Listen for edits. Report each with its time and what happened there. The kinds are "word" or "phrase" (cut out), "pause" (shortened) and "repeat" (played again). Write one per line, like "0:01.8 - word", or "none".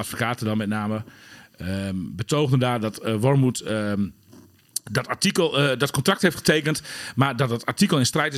none

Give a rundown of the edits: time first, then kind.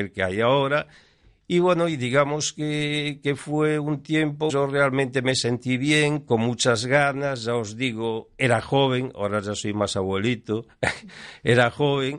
0:04.5 - phrase

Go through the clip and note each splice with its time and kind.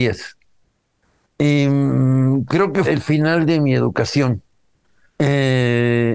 0:02.8 - word

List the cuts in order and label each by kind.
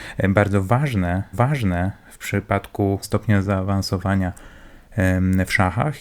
0:01.3 - repeat
0:03.0 - phrase

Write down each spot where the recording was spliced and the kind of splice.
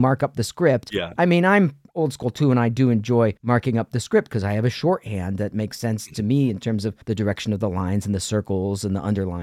0:03.4 - pause
0:07.0 - pause

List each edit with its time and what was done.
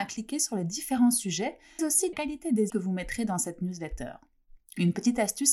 0:01.8 - word
0:02.1 - word
0:02.7 - word

